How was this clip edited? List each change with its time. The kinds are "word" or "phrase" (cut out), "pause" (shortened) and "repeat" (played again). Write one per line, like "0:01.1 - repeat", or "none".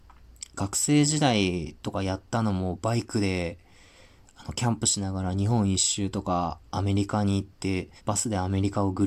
0:06.7 - pause
0:08.0 - pause